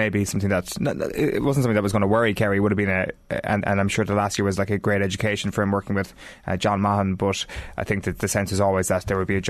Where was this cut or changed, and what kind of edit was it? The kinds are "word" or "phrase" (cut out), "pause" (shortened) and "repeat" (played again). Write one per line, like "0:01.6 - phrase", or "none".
none